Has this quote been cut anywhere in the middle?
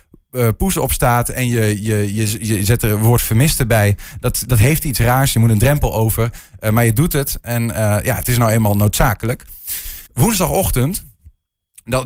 yes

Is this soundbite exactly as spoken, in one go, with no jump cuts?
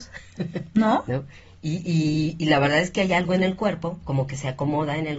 yes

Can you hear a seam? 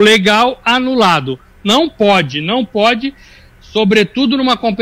no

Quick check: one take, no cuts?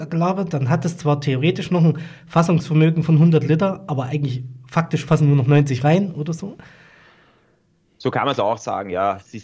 yes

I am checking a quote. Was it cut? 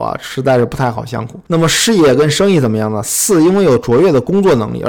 no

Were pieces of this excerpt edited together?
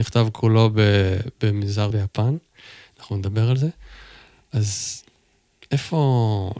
yes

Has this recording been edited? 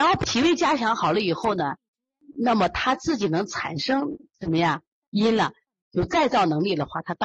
no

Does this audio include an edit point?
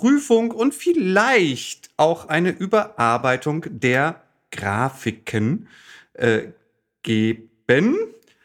no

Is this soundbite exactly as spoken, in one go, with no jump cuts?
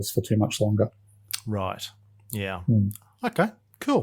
yes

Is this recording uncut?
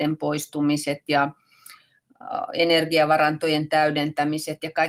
yes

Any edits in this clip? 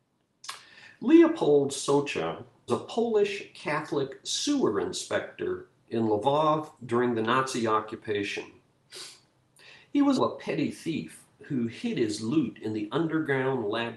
yes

